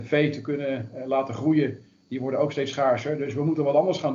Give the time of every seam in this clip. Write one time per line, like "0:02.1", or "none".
none

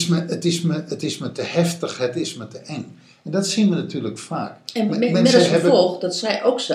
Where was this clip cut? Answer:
none

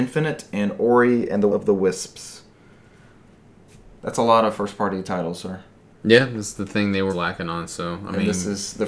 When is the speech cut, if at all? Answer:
0:01.5
0:07.1

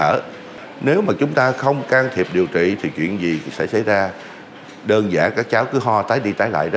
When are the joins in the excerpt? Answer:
none

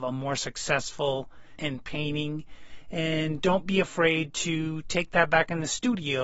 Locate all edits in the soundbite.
0:01.6

